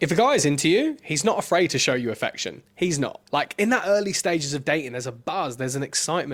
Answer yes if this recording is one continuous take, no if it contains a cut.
no